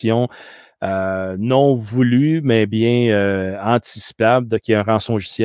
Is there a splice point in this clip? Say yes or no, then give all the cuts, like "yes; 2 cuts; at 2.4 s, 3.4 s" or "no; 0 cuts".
no; 0 cuts